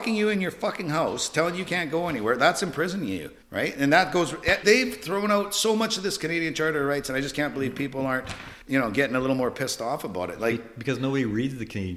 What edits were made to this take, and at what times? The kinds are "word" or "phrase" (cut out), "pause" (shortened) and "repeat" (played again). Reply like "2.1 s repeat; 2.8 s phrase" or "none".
3.4 s pause; 4.6 s word; 8.6 s pause